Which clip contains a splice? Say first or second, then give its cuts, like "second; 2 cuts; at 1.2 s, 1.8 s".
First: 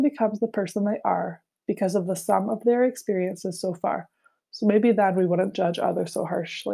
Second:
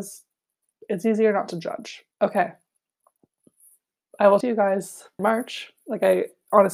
second; 3 cuts; at 2.1 s, 4.4 s, 5.2 s